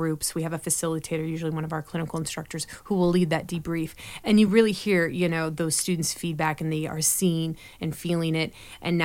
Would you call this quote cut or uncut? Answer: uncut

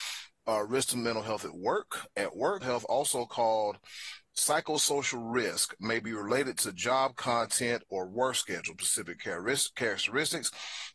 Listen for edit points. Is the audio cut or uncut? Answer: cut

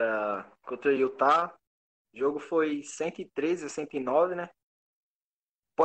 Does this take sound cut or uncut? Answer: uncut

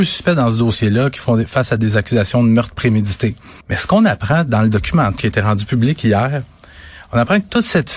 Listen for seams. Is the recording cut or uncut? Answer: cut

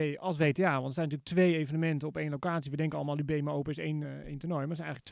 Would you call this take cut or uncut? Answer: uncut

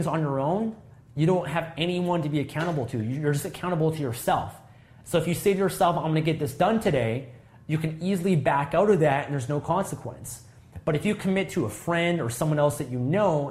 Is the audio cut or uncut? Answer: uncut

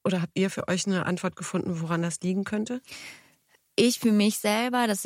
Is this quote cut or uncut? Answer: uncut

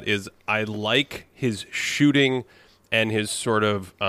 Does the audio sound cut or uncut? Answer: uncut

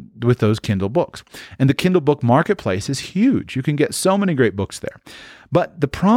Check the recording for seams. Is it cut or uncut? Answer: uncut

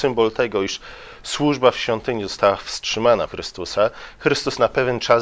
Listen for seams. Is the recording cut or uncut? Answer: cut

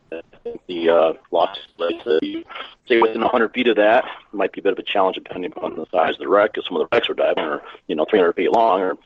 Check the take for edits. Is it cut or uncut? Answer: cut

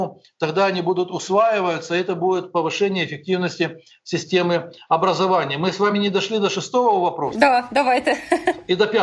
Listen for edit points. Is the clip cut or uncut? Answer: uncut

